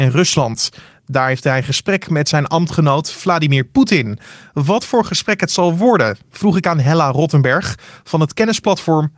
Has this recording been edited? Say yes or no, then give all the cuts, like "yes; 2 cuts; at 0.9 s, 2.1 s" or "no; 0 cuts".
no; 0 cuts